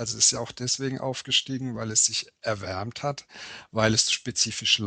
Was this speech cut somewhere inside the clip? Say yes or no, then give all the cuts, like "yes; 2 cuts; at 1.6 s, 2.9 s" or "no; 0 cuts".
no; 0 cuts